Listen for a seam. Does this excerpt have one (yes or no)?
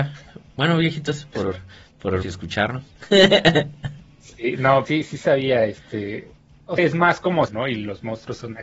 yes